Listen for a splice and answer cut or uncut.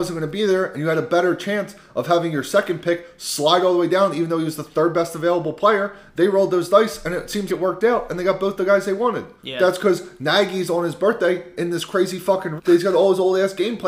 cut